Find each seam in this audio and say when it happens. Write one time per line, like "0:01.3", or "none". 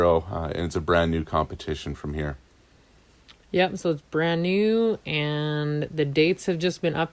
none